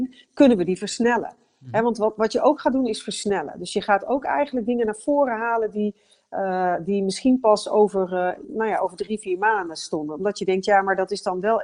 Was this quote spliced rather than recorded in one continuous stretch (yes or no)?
no